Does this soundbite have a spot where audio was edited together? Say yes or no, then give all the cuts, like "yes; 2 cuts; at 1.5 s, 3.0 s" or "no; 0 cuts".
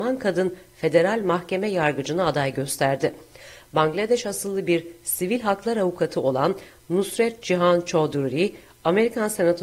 no; 0 cuts